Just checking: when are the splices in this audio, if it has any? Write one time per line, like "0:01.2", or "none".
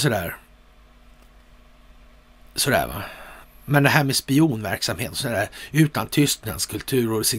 0:03.4